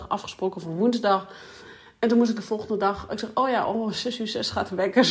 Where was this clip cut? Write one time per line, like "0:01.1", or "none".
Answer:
none

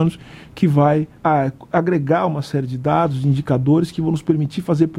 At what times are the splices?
0:01.2

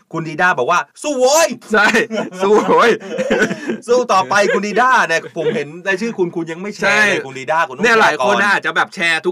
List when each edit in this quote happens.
0:00.9
0:01.6

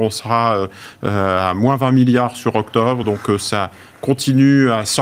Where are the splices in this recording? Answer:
none

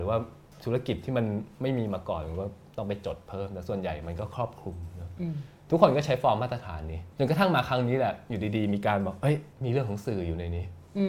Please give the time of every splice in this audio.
0:07.1
0:09.5

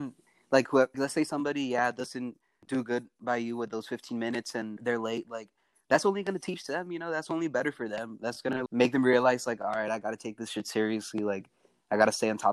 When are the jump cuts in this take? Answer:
0:00.9
0:02.6
0:04.8
0:08.7

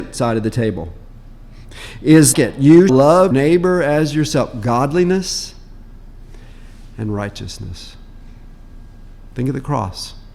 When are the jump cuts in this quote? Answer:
0:02.3
0:02.9
0:03.3

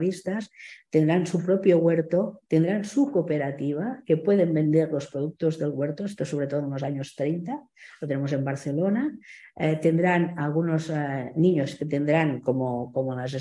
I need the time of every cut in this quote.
0:02.5

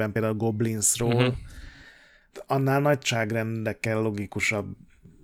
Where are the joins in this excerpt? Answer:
none

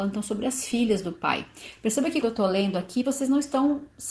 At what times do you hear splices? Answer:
0:02.2
0:03.0

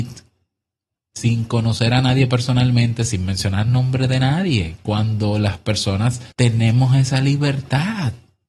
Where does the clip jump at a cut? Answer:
0:06.3

